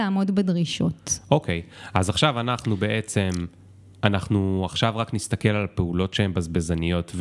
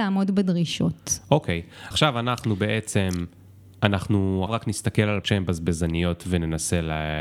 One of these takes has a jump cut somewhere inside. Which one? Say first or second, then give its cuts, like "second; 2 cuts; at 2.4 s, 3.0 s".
second; 3 cuts; at 1.9 s, 4.5 s, 5.2 s